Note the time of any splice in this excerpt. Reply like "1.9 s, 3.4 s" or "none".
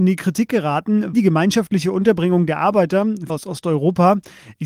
1.1 s, 3.3 s